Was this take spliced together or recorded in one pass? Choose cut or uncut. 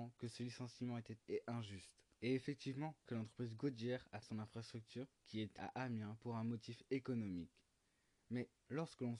cut